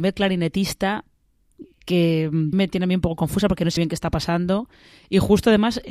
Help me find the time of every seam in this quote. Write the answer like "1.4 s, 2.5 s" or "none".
2.5 s, 3.8 s